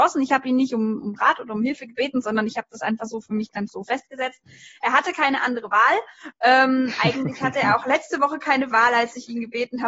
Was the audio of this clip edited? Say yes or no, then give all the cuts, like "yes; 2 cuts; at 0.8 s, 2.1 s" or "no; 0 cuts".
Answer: no; 0 cuts